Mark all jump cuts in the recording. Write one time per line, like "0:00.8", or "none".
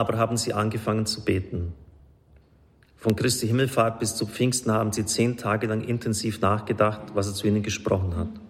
none